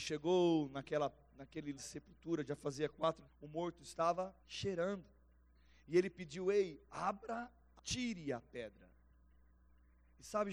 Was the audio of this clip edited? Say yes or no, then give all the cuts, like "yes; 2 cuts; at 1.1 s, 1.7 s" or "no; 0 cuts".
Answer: yes; 4 cuts; at 1.8 s, 3.3 s, 4.4 s, 7.8 s